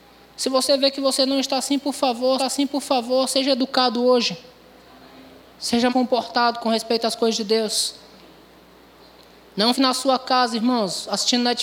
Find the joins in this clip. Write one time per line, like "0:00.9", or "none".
0:02.4
0:05.9
0:09.7